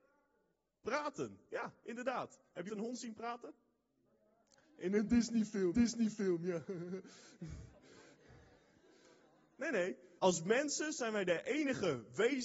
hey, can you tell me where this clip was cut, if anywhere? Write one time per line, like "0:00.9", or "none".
0:02.7
0:05.7
0:10.2